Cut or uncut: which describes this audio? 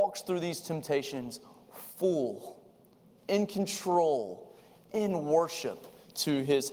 uncut